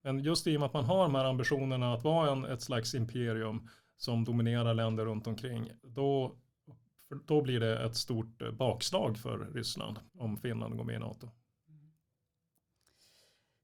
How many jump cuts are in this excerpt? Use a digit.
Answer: 2